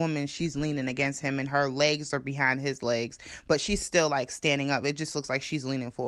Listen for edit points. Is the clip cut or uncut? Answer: uncut